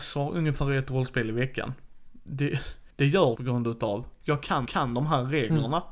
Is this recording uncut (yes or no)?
no